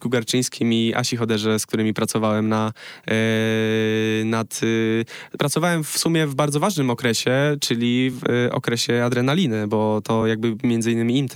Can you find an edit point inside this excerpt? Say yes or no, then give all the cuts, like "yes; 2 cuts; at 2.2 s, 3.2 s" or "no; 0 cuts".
no; 0 cuts